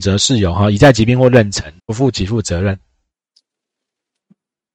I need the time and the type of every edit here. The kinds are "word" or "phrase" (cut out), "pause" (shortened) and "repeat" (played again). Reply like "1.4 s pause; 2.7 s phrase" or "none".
1.8 s pause